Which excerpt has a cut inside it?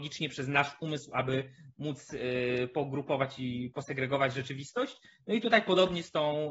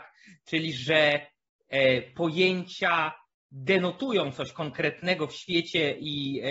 second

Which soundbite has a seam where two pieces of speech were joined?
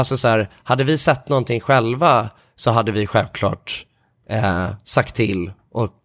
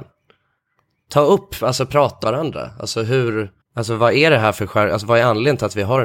second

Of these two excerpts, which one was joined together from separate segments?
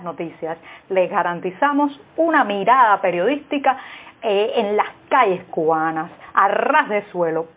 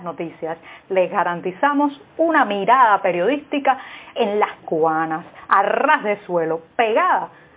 second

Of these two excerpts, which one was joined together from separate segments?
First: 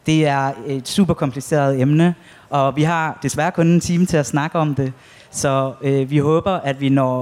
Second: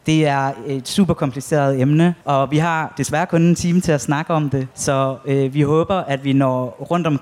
second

